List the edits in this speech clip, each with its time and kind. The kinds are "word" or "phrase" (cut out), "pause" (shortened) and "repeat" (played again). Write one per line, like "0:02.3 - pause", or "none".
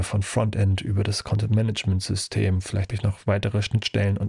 0:02.9 - word